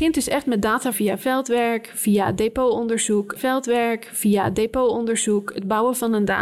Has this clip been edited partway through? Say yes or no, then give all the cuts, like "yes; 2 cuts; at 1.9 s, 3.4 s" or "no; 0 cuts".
yes; 2 cuts; at 0.9 s, 3.4 s